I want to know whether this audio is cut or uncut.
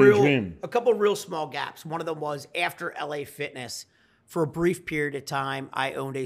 uncut